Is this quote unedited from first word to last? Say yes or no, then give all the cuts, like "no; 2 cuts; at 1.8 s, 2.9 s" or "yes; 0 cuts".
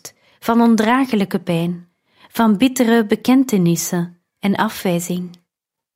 yes; 0 cuts